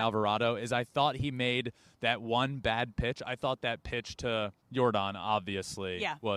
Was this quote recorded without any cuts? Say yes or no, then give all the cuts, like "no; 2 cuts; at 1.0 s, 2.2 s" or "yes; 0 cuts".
no; 1 cut; at 4.6 s